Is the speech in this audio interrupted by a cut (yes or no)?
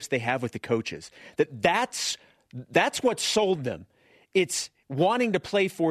no